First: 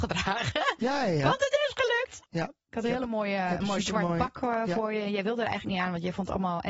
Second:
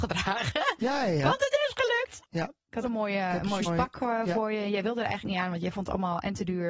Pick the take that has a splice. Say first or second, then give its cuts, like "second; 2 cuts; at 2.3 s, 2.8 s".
second; 2 cuts; at 2.8 s, 3.6 s